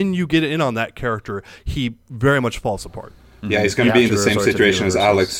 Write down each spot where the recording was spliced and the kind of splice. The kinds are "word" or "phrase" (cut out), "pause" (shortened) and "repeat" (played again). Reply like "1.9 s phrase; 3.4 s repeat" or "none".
none

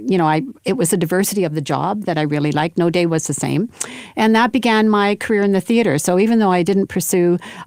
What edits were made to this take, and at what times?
none

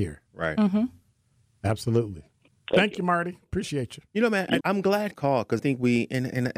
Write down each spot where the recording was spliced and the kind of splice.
4.6 s word; 5.1 s word; 5.6 s word

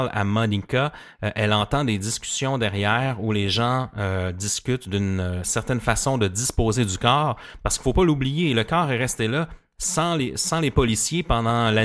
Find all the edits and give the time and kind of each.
none

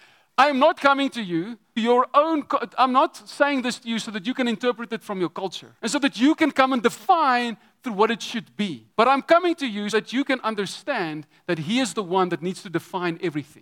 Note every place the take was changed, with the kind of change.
1.8 s word; 5.8 s pause; 8.9 s pause; 9.9 s word

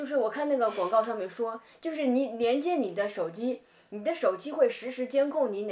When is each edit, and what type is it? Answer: none

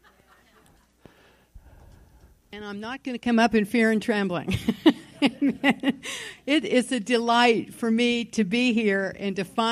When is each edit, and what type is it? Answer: none

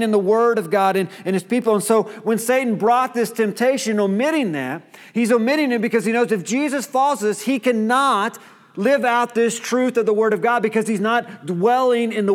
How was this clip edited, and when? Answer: none

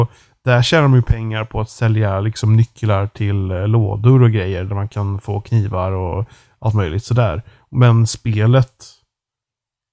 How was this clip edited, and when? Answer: none

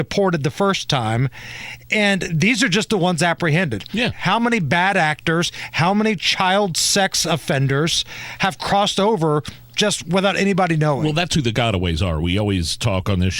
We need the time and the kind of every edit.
none

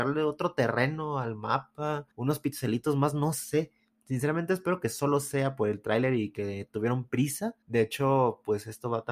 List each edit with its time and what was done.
2.1 s pause; 7.6 s pause

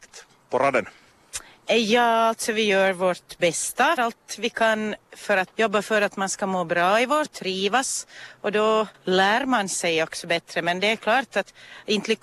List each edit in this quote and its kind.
4.0 s word; 5.0 s pause; 5.5 s word; 7.2 s word; 8.9 s pause

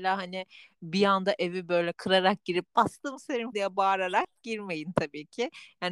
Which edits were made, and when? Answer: 1.9 s word; 3.5 s word

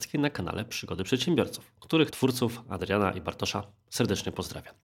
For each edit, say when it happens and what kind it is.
2.1 s word

